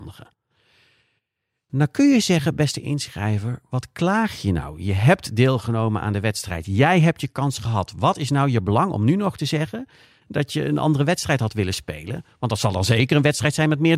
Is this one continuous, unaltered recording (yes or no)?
yes